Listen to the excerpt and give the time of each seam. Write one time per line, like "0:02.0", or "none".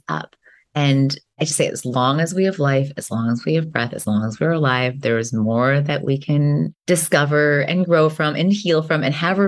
0:01.3
0:06.8